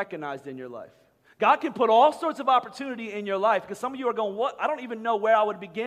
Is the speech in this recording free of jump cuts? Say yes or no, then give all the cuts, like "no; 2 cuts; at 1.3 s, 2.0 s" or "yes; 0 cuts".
yes; 0 cuts